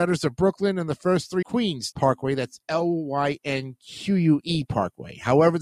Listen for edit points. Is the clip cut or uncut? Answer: cut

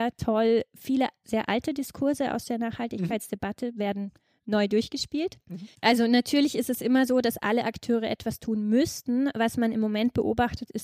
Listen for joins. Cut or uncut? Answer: uncut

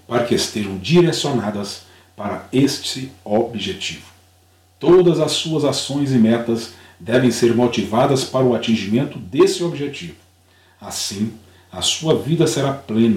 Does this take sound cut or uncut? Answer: uncut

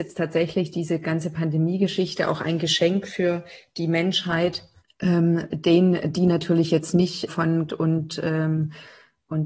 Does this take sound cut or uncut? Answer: cut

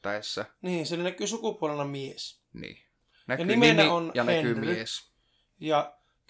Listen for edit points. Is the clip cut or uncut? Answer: uncut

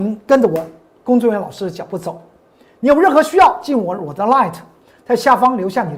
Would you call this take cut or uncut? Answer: uncut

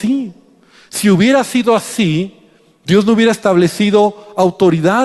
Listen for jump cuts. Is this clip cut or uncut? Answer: uncut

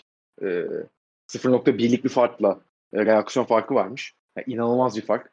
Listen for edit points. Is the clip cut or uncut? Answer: uncut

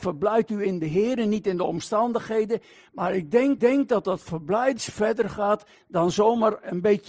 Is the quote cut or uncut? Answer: cut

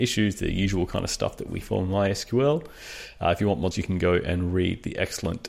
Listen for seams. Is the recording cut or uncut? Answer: cut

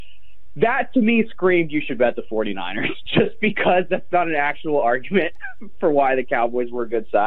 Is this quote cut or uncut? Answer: uncut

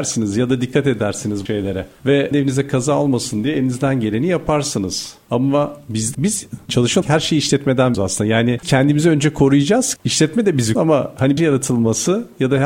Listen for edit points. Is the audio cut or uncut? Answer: cut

